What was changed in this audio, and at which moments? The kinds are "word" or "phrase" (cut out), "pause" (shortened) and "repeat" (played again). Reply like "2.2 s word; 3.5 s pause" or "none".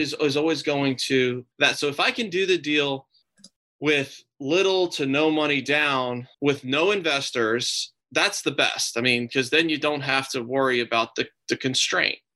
1.5 s pause; 3.2 s pause; 6.3 s pause